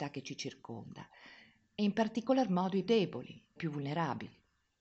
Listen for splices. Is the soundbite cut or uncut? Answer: cut